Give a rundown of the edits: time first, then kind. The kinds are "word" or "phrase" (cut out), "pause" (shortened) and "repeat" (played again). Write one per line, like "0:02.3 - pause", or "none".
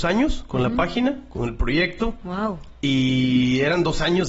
none

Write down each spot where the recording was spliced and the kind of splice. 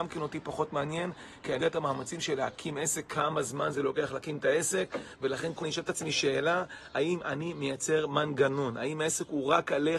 0:01.6 - word
0:05.6 - word

